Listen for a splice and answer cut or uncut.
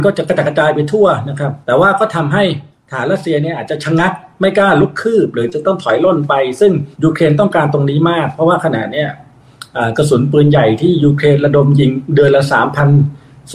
cut